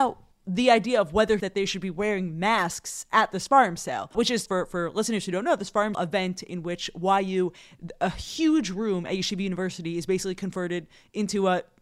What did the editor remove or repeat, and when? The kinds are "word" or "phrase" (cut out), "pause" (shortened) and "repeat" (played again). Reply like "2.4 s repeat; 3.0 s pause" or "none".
1.4 s phrase; 4.1 s word; 4.5 s word; 5.9 s phrase